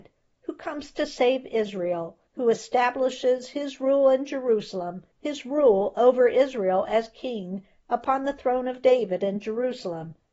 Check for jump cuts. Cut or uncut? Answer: cut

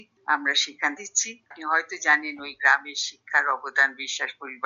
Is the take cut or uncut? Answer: cut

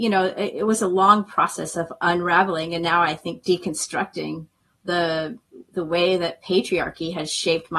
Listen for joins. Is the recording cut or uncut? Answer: uncut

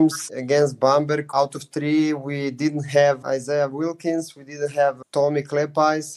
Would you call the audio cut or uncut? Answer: uncut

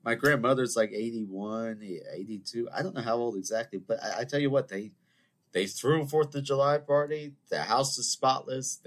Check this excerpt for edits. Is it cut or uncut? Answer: uncut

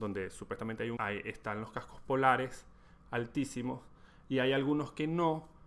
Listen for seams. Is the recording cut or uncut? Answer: cut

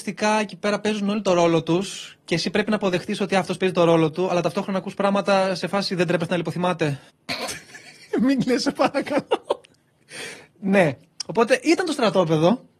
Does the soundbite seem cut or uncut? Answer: uncut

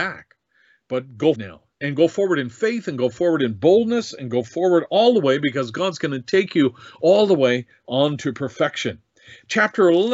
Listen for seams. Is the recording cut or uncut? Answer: cut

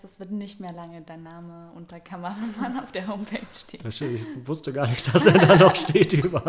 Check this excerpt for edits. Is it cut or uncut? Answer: uncut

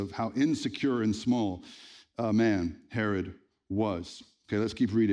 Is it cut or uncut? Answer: uncut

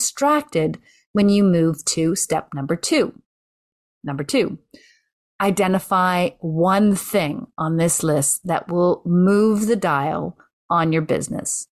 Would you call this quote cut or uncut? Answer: uncut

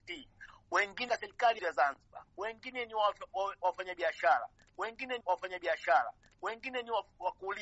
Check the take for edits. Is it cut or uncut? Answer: cut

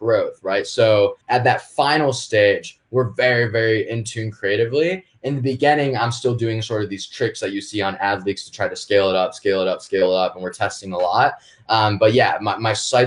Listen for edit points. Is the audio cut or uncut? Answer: cut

